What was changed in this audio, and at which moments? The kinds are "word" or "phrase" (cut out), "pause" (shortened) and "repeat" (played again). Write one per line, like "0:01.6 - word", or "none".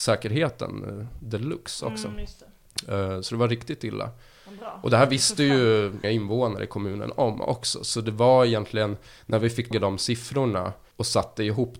0:06.0 - word
0:09.7 - word